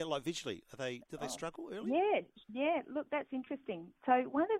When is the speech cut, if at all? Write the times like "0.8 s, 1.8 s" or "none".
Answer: 2.4 s